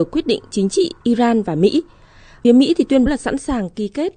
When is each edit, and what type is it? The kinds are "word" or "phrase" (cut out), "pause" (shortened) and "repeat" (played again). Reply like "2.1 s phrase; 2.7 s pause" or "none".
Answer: 1.0 s word; 2.4 s word; 3.1 s word